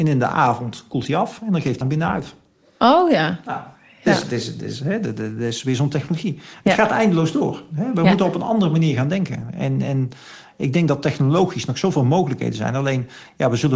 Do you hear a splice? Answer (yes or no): yes